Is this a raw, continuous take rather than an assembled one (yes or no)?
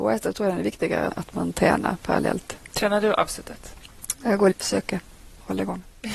no